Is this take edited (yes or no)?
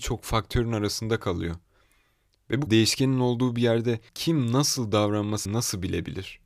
yes